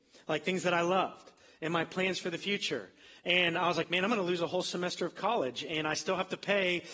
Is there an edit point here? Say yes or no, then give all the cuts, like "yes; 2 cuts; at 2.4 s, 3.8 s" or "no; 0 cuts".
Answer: no; 0 cuts